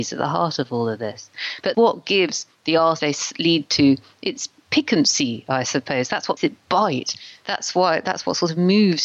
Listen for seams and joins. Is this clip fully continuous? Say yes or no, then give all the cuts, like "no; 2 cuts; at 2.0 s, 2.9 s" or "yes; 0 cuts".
no; 4 cuts; at 1.7 s, 3.0 s, 4.6 s, 6.4 s